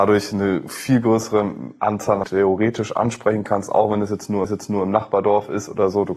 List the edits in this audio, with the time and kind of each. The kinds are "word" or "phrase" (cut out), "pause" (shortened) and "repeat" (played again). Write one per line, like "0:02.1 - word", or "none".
0:02.2 - word
0:04.4 - repeat